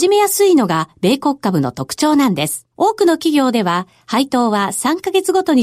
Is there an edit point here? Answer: yes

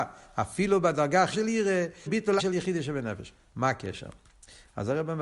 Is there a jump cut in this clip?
yes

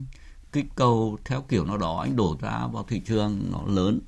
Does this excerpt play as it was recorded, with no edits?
no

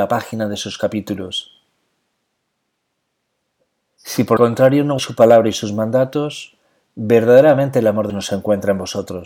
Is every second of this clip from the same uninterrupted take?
no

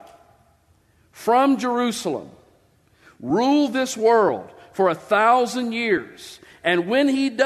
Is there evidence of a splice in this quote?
no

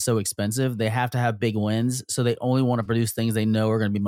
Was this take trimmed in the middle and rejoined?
no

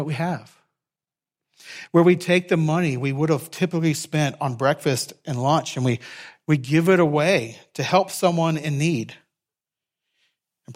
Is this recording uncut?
yes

